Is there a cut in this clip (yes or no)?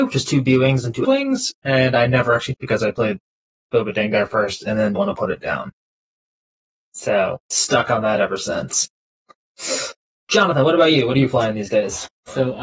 yes